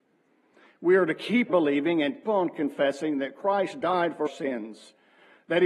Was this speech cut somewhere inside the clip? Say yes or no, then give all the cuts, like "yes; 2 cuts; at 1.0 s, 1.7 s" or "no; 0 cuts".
yes; 3 cuts; at 1.5 s, 2.2 s, 4.3 s